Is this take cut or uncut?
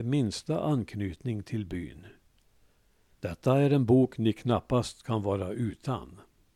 uncut